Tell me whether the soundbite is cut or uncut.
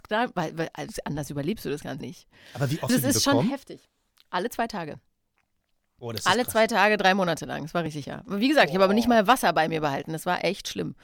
cut